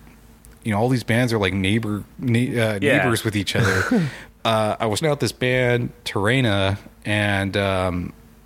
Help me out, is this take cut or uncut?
cut